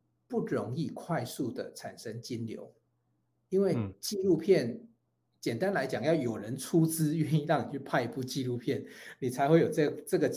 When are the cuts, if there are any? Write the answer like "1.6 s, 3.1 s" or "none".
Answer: none